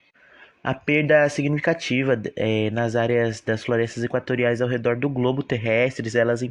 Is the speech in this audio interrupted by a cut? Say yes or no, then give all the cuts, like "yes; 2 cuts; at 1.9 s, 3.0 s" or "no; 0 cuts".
no; 0 cuts